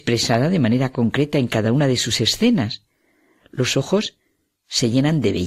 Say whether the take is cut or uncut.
uncut